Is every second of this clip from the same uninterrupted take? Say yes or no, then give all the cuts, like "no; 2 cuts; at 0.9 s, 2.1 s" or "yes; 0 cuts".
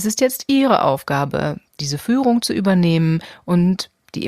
yes; 0 cuts